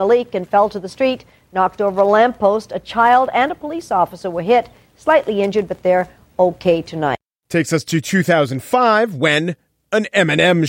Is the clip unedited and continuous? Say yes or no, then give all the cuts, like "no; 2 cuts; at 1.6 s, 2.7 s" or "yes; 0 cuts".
yes; 0 cuts